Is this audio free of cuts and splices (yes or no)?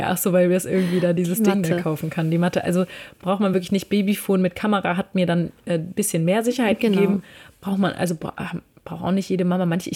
yes